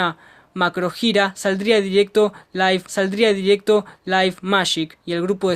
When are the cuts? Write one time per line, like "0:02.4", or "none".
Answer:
0:02.9

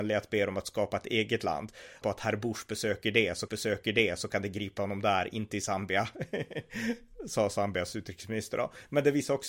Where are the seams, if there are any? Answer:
0:02.0
0:03.5

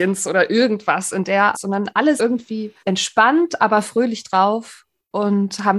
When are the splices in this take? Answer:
0:01.5
0:02.2
0:02.8

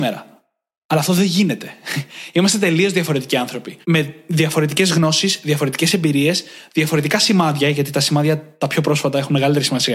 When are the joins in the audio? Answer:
0:03.8

